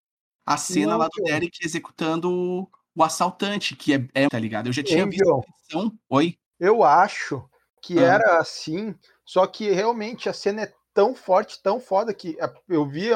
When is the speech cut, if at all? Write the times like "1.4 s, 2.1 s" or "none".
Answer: 4.3 s, 6.5 s